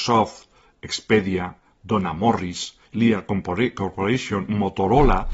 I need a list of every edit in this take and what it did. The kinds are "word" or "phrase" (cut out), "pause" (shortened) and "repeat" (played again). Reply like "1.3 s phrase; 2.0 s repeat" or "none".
2.9 s pause